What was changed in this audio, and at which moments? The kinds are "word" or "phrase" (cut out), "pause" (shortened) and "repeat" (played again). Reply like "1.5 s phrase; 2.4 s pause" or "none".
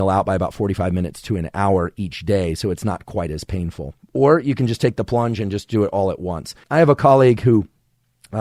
4.0 s pause; 6.6 s pause